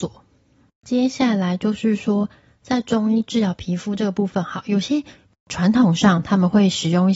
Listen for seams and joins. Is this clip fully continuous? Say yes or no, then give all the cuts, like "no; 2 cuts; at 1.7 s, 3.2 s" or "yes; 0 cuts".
yes; 0 cuts